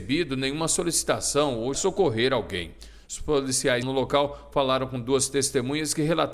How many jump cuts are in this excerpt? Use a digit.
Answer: 2